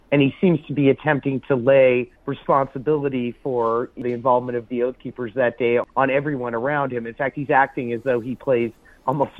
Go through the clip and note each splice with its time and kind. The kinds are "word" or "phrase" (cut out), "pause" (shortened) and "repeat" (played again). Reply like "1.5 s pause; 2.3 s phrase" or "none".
2.2 s pause; 5.9 s pause